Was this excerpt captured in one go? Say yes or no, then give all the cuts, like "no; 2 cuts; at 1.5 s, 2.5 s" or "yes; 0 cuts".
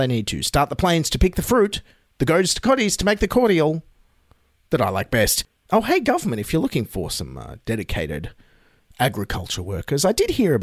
yes; 0 cuts